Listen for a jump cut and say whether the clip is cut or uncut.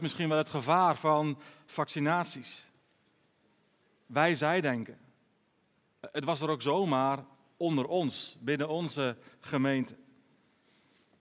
uncut